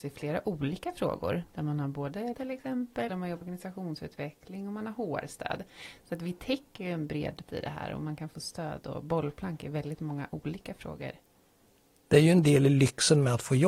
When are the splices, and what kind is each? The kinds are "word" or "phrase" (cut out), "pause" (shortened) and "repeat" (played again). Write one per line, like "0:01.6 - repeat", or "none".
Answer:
0:02.3 - word
0:03.1 - word
0:03.4 - word
0:07.5 - word